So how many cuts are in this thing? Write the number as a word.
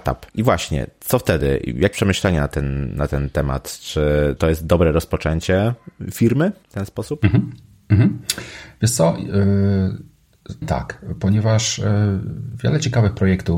three